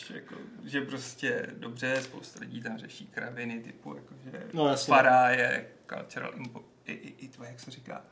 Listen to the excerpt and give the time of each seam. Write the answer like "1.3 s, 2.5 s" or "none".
none